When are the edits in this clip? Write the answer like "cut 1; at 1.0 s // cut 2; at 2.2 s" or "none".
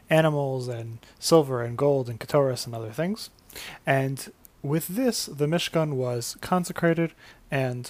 cut 1; at 4.4 s